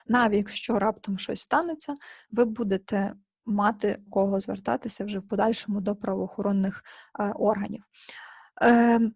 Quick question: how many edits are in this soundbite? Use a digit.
2